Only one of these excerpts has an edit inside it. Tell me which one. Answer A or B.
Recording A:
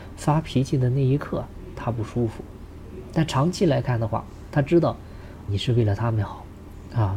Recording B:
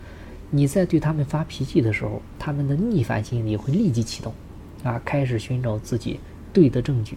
A